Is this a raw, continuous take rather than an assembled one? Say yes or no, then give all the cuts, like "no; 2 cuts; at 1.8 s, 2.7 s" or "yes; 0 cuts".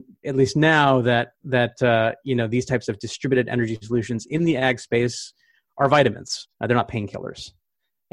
no; 1 cut; at 6.5 s